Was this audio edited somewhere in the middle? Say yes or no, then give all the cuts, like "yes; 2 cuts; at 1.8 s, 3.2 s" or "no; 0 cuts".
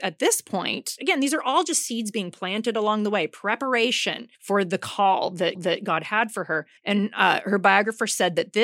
yes; 3 cuts; at 4.3 s, 5.5 s, 6.8 s